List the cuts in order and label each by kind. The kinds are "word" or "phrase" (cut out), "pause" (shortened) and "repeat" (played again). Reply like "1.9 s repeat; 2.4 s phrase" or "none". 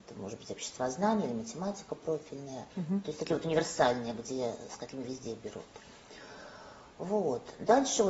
2.7 s pause